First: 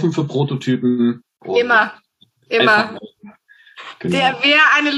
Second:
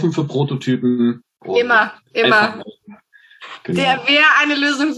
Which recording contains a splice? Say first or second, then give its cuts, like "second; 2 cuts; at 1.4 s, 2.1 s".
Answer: second; 1 cut; at 2.0 s